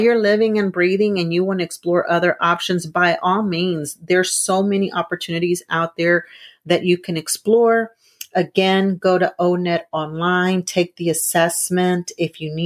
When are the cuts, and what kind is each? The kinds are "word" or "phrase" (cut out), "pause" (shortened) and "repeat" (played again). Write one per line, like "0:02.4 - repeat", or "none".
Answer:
none